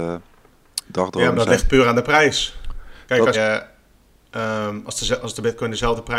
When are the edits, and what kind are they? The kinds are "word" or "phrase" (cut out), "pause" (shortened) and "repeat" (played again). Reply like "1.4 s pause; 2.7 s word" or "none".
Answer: 3.3 s word